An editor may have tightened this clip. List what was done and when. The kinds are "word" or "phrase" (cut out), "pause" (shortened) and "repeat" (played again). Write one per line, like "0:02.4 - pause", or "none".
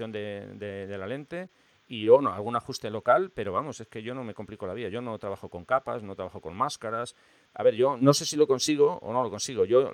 none

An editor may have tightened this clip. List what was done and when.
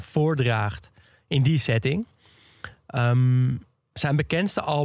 none

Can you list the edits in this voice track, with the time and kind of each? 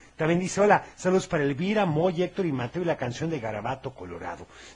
none

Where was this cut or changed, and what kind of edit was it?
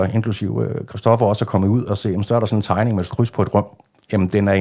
0:03.1 - word

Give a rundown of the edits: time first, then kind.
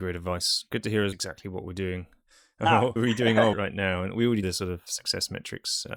0:01.1 - phrase
0:03.0 - word
0:03.5 - word
0:04.4 - word

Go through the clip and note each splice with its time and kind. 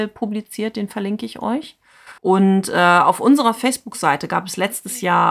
0:02.2 - pause

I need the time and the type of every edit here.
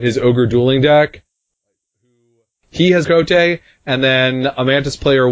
0:03.0 - phrase

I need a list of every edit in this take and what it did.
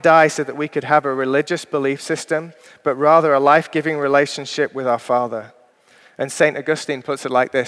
none

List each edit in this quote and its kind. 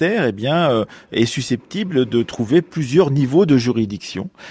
none

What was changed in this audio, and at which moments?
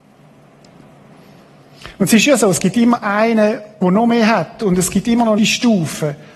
0:05.4 - word

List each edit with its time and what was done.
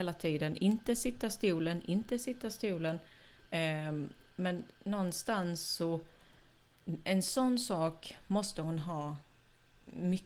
none

